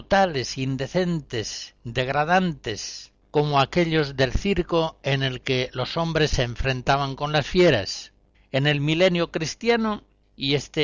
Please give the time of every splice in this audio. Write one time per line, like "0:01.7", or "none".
0:03.2
0:08.3

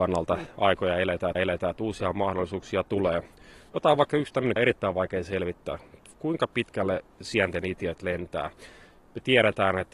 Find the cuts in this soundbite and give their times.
0:01.4
0:04.6

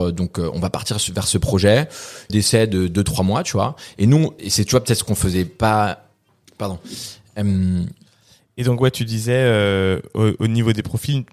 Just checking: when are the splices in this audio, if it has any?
0:02.3
0:04.4

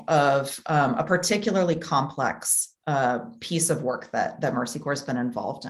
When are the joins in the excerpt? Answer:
none

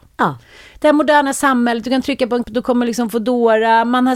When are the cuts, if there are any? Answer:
0:02.4

